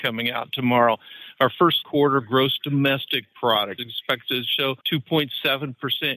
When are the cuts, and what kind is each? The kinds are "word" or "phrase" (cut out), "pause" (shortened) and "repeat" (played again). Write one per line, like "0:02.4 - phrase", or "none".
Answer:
0:01.8 - phrase
0:03.8 - word
0:04.8 - pause

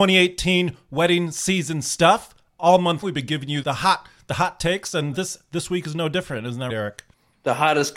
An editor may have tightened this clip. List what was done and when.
0:03.0 - word
0:03.6 - word
0:05.1 - word
0:06.7 - word

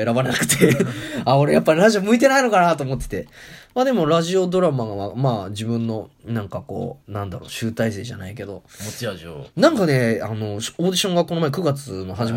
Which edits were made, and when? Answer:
0:07.0 - pause
0:09.5 - pause

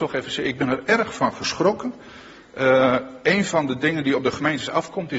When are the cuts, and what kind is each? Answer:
none

